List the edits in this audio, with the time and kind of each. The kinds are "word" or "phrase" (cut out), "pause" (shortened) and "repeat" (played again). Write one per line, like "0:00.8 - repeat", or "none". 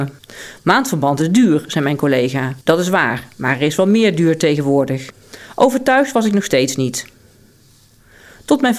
0:02.6 - pause